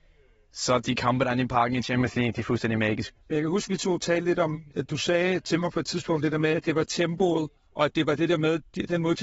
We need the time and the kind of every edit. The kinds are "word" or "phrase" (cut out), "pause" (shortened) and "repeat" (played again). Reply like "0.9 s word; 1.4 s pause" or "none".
3.2 s pause